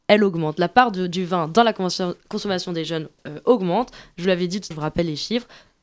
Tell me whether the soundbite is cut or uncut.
cut